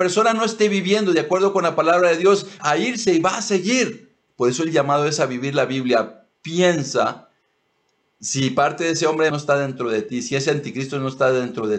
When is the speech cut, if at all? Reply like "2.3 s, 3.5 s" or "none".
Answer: 2.6 s, 4.3 s, 9.3 s